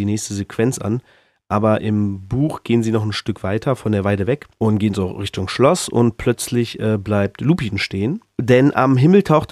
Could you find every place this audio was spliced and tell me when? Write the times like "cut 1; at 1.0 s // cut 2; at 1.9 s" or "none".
none